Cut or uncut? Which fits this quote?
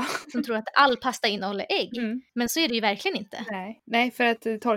cut